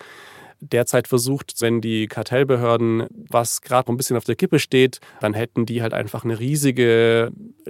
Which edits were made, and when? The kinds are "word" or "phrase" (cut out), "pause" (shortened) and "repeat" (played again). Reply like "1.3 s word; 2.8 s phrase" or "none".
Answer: 1.6 s word; 3.3 s word; 3.9 s word; 5.1 s pause